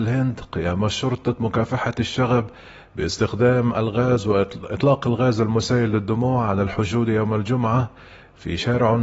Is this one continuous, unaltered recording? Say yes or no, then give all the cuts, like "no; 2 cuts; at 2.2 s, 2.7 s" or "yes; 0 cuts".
yes; 0 cuts